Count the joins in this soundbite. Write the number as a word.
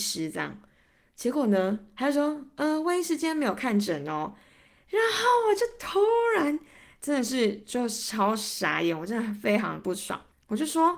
zero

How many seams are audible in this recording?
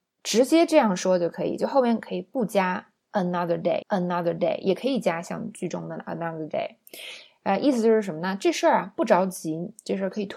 one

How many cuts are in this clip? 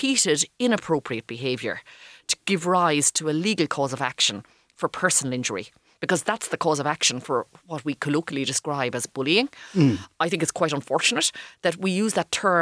zero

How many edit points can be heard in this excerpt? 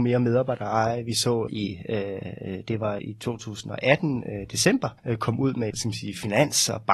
four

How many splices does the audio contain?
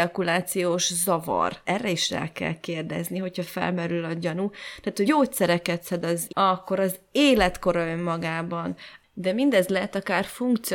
three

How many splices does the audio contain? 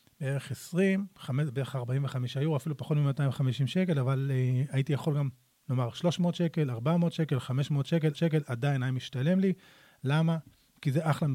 one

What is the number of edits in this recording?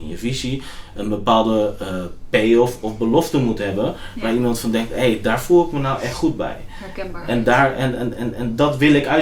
zero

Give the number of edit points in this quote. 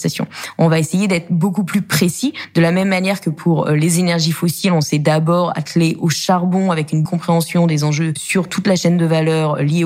one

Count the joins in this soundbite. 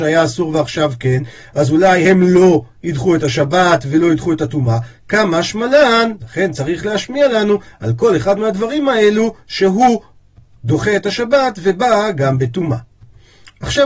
zero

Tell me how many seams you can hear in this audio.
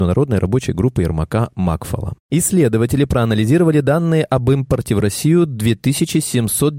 zero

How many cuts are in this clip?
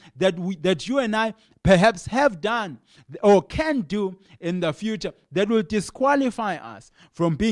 zero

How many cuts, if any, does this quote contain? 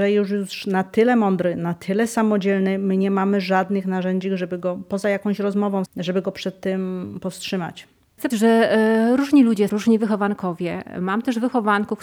three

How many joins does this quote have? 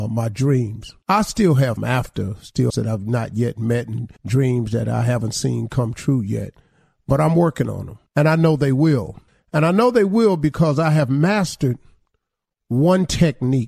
six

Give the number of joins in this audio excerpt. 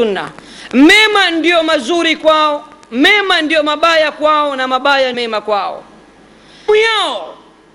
two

